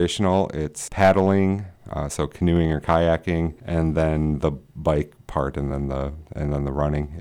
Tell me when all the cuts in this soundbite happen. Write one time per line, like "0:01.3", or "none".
none